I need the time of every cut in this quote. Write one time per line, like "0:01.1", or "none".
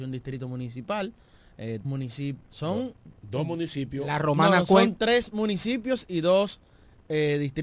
0:01.8
0:02.4
0:03.2